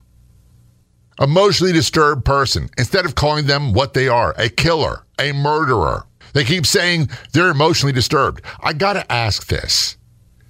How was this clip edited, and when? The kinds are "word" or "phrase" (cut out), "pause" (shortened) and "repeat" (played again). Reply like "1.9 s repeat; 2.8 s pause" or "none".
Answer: 5.1 s pause; 6.2 s pause